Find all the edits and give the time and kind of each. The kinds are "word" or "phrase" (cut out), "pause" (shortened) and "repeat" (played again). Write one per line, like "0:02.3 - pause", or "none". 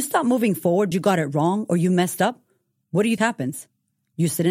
0:00.9 - word
0:03.2 - word